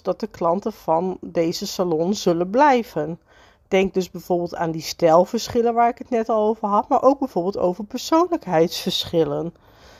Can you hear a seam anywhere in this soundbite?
no; 0 cuts

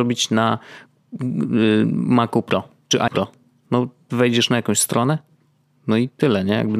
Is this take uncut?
no; 1 cut; at 3.1 s

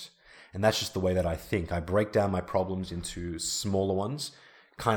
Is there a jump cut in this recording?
no; 0 cuts

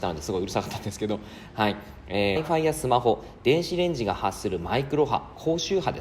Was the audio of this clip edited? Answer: yes; 1 cut; at 2.4 s

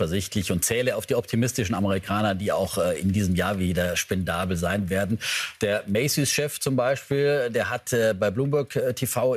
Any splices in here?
no; 0 cuts

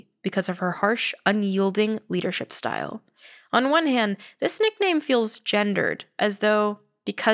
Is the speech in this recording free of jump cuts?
yes; 0 cuts

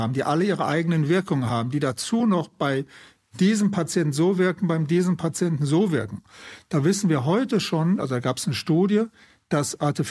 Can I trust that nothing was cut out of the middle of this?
yes; 0 cuts

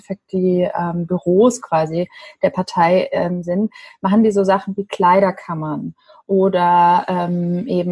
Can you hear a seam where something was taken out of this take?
no; 0 cuts

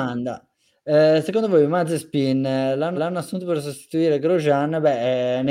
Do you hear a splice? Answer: yes; 1 cut; at 3.0 s

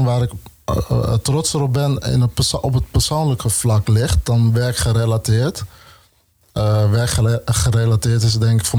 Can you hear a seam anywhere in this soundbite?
no; 0 cuts

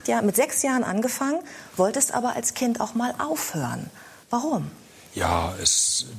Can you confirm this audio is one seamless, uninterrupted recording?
yes; 0 cuts

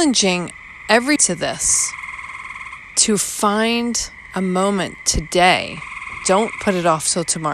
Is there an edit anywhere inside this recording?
yes; 1 cut; at 1.2 s

